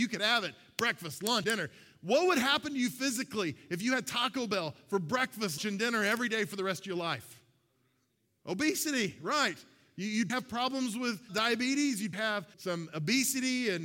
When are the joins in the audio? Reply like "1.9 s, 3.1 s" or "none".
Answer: 1.4 s, 5.6 s, 10.3 s, 11.3 s, 12.1 s, 12.5 s